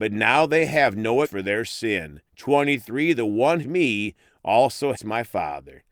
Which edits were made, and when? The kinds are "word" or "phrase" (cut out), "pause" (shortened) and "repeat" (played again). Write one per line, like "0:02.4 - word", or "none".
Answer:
0:01.2 - word
0:02.3 - pause
0:03.6 - phrase
0:05.0 - word